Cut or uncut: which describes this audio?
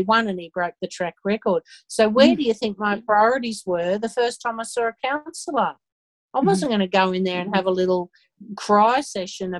uncut